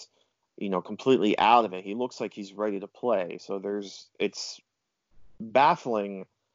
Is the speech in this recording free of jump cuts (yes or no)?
yes